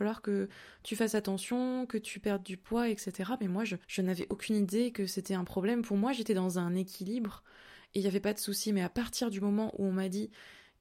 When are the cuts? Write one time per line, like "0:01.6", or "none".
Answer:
0:03.8